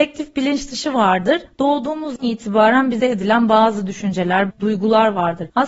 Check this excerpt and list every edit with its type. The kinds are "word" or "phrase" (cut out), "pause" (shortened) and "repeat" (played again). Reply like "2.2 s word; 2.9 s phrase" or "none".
2.2 s word; 3.0 s word; 4.5 s word